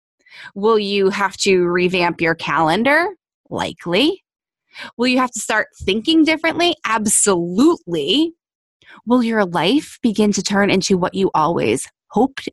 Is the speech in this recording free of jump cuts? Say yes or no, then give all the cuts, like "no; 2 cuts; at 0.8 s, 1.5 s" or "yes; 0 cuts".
yes; 0 cuts